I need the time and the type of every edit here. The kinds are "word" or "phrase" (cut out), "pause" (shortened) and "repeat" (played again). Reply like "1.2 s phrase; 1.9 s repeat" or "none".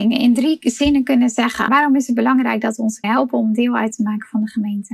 1.7 s word; 3.0 s word